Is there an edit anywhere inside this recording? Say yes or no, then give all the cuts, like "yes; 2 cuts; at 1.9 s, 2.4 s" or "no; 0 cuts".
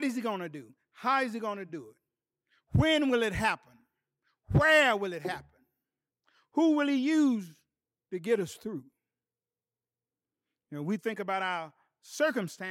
no; 0 cuts